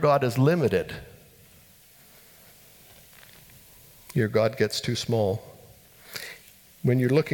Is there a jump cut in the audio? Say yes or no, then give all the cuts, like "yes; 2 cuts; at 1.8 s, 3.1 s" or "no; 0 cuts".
no; 0 cuts